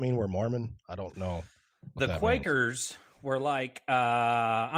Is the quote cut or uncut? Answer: uncut